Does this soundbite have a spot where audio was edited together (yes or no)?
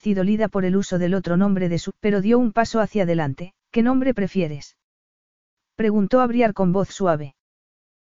yes